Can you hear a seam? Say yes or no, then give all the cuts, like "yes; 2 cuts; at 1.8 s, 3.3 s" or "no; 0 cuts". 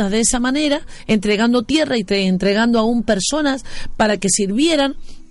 no; 0 cuts